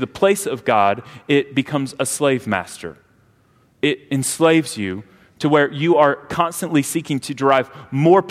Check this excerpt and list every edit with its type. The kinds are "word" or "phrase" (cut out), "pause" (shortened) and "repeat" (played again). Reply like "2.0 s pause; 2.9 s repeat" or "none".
none